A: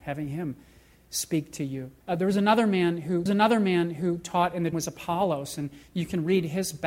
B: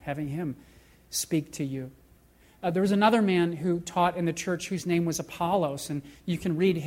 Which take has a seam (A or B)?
A